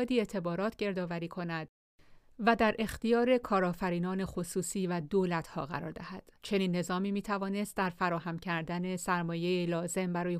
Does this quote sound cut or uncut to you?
cut